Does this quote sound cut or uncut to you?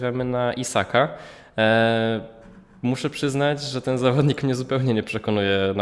uncut